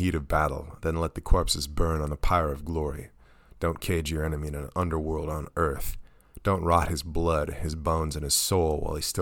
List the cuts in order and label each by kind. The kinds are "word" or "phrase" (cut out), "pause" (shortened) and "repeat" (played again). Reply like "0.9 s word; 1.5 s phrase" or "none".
none

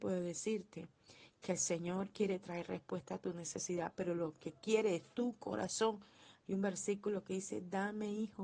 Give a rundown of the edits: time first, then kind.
none

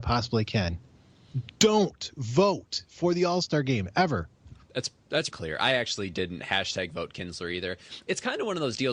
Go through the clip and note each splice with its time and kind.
5.3 s word

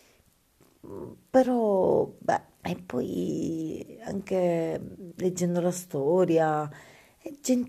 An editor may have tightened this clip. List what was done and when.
2.6 s pause

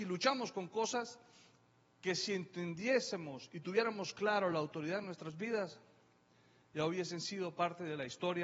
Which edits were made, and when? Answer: none

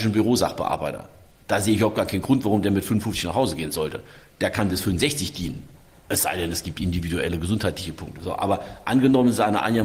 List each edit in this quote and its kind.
none

